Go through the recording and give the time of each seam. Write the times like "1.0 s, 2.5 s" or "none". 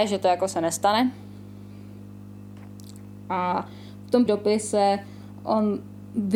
4.3 s